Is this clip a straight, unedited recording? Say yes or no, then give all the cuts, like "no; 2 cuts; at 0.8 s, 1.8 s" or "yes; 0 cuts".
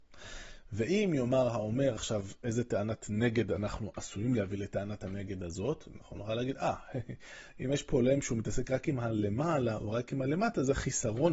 yes; 0 cuts